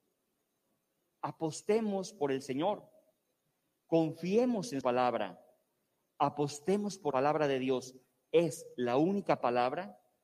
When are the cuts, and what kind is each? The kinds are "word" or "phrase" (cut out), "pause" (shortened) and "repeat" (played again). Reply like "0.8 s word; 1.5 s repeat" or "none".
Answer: 4.8 s word; 7.1 s word